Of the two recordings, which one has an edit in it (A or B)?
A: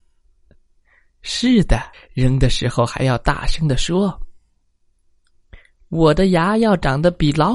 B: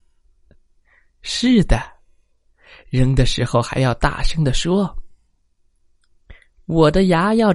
A